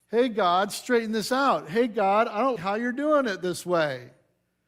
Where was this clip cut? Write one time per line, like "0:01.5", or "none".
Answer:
0:02.6